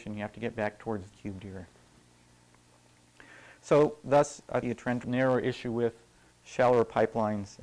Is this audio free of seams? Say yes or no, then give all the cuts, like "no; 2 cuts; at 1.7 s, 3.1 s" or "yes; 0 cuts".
no; 3 cuts; at 1.1 s, 4.6 s, 5.0 s